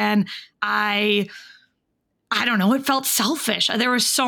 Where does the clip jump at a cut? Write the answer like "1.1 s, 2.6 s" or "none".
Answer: none